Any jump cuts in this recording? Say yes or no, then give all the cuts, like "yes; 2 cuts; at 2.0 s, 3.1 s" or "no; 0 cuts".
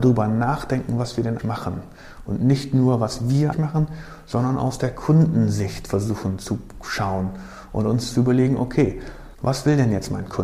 yes; 3 cuts; at 1.4 s, 3.5 s, 9.3 s